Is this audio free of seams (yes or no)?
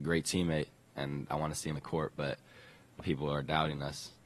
no